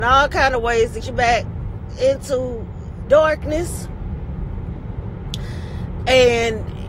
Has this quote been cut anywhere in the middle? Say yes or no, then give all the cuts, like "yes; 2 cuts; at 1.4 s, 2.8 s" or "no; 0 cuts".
yes; 2 cuts; at 1.0 s, 3.1 s